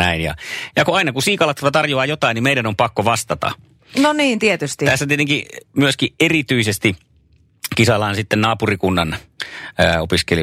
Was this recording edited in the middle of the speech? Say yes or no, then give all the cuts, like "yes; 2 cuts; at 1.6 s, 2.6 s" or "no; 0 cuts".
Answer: no; 0 cuts